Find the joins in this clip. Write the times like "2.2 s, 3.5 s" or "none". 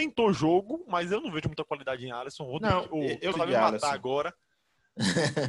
3.3 s